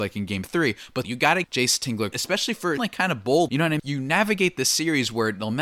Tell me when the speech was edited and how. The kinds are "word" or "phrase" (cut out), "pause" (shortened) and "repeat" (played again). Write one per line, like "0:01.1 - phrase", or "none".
0:01.0 - word
0:01.4 - word
0:02.1 - word
0:02.8 - word
0:03.5 - word
0:03.8 - word